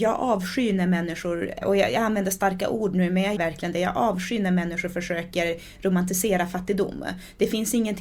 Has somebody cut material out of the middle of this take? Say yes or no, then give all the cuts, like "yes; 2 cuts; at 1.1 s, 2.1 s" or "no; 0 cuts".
yes; 2 cuts; at 1.6 s, 3.4 s